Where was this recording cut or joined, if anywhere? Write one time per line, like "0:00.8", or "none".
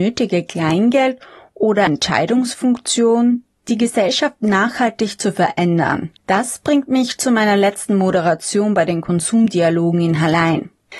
0:01.9
0:06.2